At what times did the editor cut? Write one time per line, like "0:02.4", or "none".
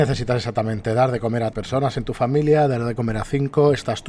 0:01.5